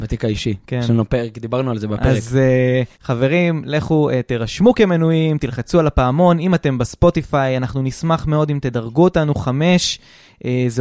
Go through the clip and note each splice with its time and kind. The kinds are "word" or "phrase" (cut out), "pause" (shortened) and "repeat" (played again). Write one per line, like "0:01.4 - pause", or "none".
0:02.9 - pause